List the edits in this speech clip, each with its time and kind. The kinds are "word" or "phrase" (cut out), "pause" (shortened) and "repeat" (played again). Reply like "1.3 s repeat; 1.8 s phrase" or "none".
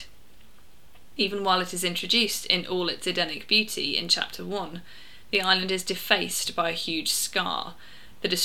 none